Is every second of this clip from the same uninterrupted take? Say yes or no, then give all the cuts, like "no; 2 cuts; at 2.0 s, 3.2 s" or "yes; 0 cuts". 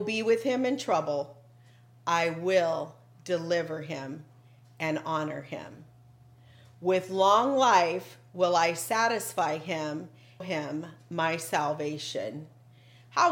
no; 1 cut; at 10.4 s